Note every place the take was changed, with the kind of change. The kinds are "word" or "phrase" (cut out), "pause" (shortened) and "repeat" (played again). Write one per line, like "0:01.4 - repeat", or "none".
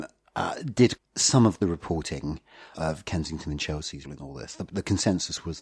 0:01.0 - word
0:02.7 - word
0:04.0 - word